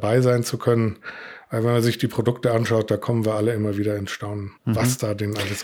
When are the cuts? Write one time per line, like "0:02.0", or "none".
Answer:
0:04.6